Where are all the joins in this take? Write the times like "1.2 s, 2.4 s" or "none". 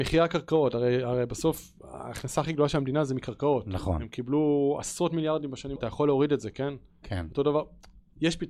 5.8 s